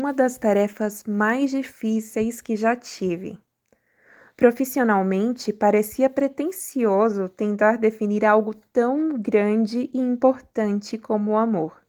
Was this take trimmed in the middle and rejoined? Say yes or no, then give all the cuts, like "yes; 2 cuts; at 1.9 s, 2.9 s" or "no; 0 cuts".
no; 0 cuts